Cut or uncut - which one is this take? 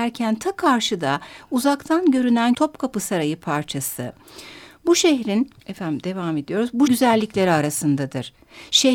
cut